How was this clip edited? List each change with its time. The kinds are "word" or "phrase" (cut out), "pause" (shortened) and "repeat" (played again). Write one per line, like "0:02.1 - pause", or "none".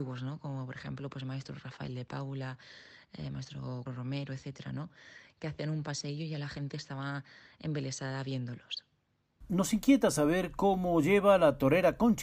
0:03.9 - word

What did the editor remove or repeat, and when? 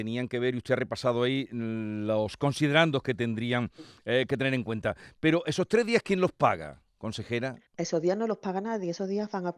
0:07.7 - pause

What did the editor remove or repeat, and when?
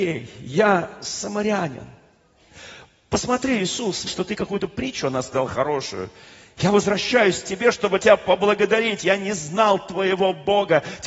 0:04.0 - phrase

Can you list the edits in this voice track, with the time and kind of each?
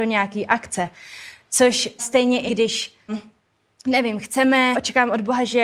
0:02.0 - word
0:02.5 - word
0:03.1 - word
0:04.7 - word

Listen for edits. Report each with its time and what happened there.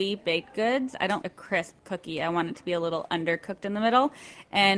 0:01.2 - word

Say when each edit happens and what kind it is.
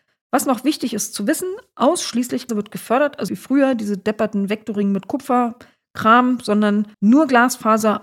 0:02.5 - word
0:03.3 - word
0:06.9 - pause

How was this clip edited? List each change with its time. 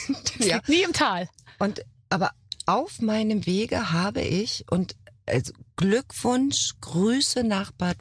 none

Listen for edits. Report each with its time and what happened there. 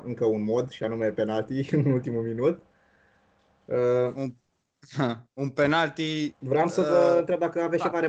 none

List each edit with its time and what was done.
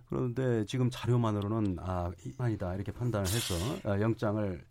0:02.4 - phrase

